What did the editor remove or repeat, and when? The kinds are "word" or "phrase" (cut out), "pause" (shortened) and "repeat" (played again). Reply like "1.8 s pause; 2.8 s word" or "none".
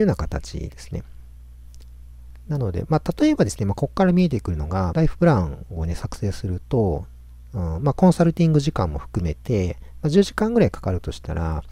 4.9 s phrase

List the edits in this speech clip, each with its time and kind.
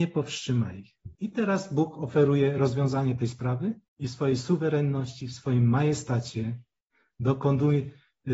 1.1 s pause; 3.9 s pause

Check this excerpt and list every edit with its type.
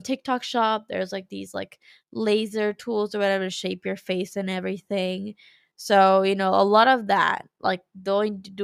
none

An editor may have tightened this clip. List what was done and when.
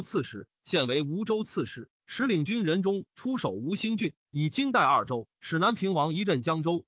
5.3 s pause

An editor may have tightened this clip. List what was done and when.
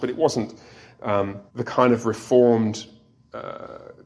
1.5 s pause

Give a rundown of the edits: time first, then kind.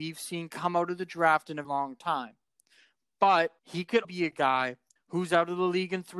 1.6 s word; 3.6 s pause; 4.0 s word; 5.0 s pause

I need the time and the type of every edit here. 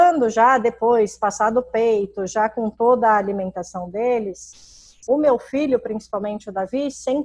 none

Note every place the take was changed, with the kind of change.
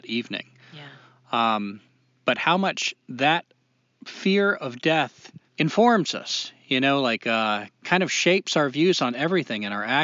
5.5 s pause

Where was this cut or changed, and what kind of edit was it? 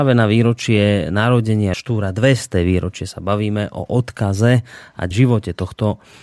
1.7 s word; 5.1 s word

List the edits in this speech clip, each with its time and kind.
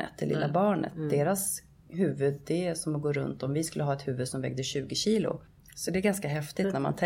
none

